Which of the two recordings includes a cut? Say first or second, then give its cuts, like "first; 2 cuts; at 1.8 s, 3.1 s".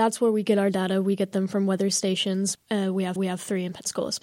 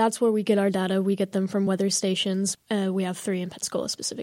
first; 1 cut; at 3.2 s